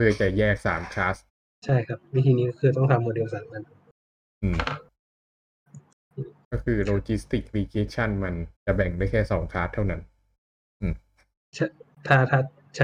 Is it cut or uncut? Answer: cut